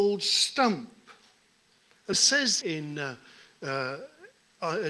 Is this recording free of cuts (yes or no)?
no